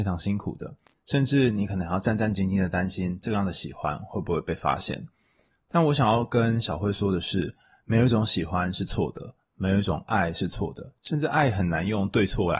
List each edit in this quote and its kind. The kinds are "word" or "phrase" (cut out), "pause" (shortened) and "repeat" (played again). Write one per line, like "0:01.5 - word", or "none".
none